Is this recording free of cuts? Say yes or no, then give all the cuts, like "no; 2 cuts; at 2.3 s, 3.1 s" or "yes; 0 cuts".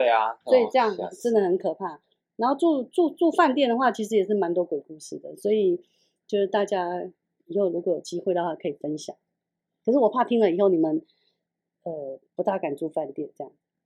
no; 1 cut; at 12.3 s